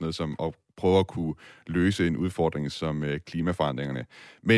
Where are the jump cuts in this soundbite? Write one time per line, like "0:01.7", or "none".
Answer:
none